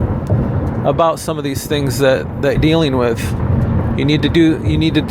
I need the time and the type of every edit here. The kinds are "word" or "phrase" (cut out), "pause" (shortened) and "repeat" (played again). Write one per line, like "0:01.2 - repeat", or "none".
0:02.6 - word